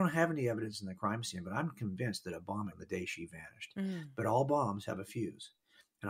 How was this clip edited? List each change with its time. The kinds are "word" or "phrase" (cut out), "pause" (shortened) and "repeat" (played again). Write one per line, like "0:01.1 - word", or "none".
0:02.7 - word